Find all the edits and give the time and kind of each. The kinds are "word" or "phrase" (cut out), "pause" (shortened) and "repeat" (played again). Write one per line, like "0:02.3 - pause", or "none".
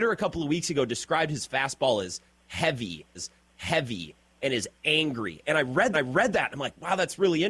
0:03.2 - repeat
0:05.9 - repeat